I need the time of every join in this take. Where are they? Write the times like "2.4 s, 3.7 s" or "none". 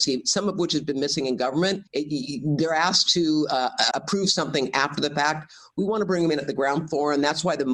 1.9 s, 3.9 s